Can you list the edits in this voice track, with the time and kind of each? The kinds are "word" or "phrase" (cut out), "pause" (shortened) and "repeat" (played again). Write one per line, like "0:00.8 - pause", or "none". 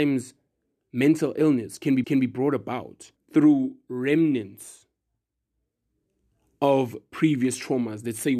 0:02.0 - repeat
0:03.2 - pause